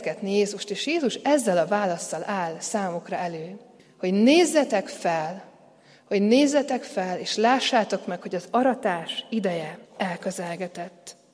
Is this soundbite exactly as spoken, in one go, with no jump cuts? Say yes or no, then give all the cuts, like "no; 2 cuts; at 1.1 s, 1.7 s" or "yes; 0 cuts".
no; 2 cuts; at 3.8 s, 9.9 s